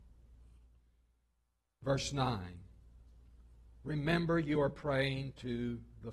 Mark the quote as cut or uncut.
uncut